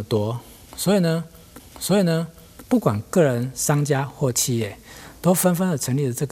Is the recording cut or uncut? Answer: cut